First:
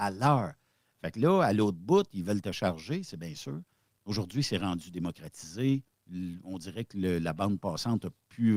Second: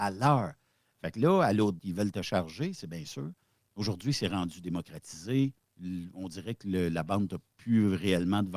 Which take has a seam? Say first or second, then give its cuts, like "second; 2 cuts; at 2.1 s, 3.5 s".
second; 2 cuts; at 1.8 s, 7.3 s